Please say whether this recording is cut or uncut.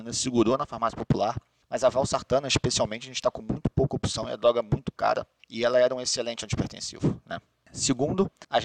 uncut